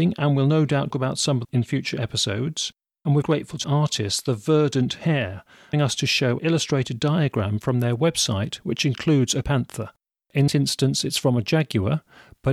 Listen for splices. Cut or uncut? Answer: cut